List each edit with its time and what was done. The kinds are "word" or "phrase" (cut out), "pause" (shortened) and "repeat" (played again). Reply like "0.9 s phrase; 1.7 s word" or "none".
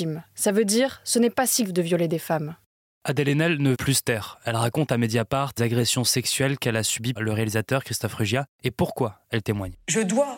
1.6 s word; 3.7 s word; 5.6 s word; 7.2 s word